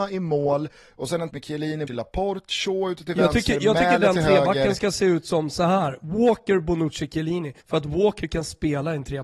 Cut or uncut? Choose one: cut